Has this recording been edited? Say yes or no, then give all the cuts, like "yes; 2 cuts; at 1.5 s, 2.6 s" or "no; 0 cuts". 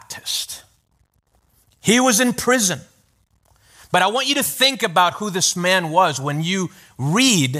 no; 0 cuts